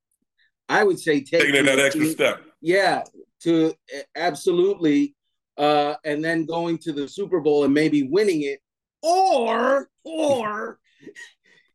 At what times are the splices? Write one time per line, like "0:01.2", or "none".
0:02.5
0:10.0